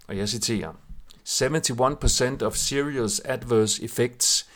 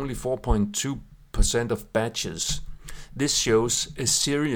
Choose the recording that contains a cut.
first; 1 cut; at 1.2 s

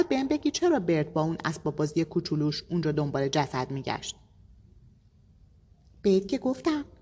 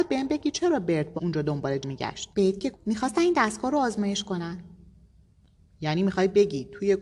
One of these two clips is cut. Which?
second; 4 cuts; at 1.2 s, 1.8 s, 2.3 s, 2.7 s

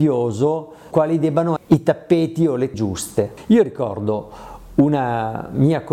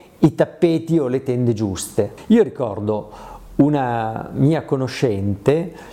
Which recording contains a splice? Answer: first; 3 cuts; at 0.9 s, 1.6 s, 2.7 s

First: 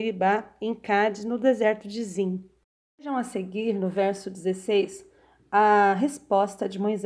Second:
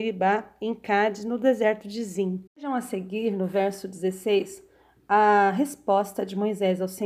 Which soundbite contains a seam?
second; 1 cut; at 2.5 s

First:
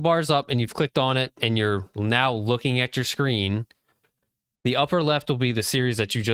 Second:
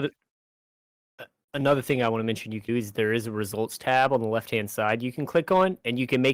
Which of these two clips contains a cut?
second; 1 cut; at 2.7 s

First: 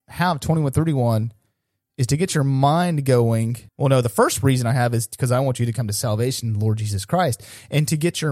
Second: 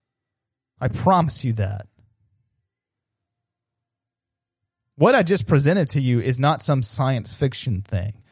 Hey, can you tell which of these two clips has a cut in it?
first; 1 cut; at 3.7 s

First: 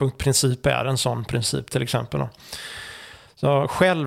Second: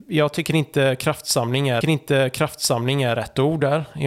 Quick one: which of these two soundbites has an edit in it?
second; 1 cut; at 1.8 s

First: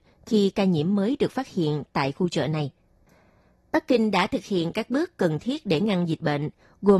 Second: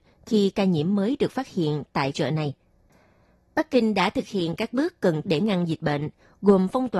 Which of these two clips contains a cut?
second; 2 cuts; at 2.1 s, 5.2 s

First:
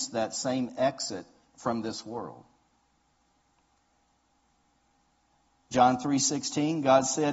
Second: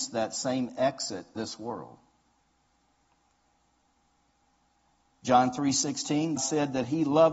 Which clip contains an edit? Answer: second; 2 cuts; at 1.4 s, 6.4 s

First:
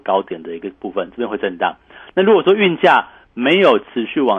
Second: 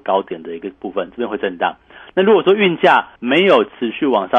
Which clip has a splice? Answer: second; 1 cut; at 3.2 s

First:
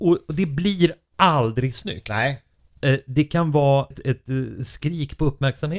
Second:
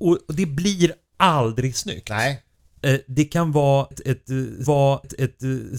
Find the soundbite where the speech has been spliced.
second; 1 cut; at 4.7 s

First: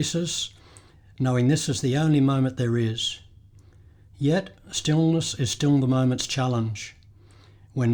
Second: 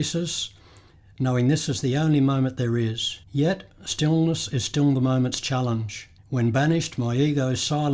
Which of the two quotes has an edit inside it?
second; 2 cuts; at 3.2 s, 6.2 s

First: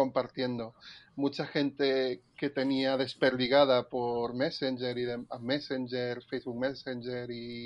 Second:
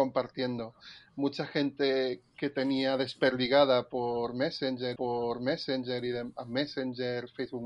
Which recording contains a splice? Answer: second; 1 cut; at 5.0 s

